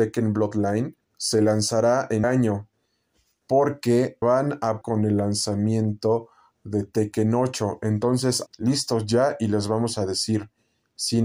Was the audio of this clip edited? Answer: yes; 5 cuts; at 1.0 s, 2.2 s, 4.2 s, 4.8 s, 8.5 s

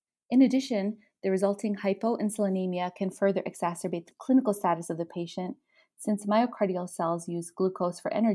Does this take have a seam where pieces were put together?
no; 0 cuts

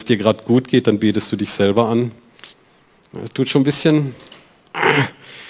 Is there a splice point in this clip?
no; 0 cuts

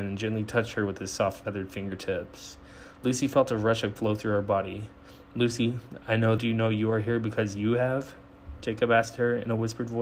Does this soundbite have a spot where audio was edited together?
yes; 2 cuts; at 4.0 s, 6.4 s

